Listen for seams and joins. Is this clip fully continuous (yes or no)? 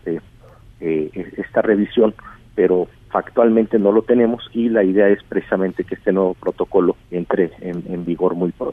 no